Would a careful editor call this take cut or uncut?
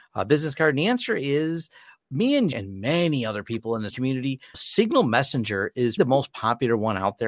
cut